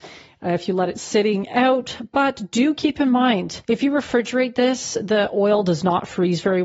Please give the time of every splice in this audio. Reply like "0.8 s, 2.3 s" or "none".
3.6 s